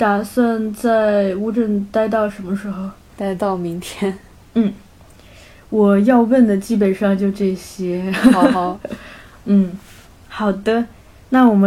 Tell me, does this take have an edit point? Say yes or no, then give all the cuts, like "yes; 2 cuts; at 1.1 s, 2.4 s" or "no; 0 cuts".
no; 0 cuts